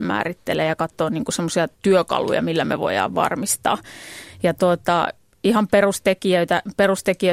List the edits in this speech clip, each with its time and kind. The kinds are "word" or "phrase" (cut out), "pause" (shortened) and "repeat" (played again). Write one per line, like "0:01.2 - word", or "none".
0:01.7 - pause